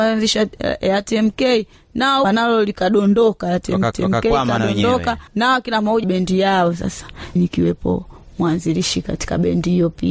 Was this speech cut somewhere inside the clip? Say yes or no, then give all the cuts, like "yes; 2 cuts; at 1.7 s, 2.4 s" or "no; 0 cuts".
yes; 5 cuts; at 2.2 s, 3.9 s, 5.3 s, 6.0 s, 7.4 s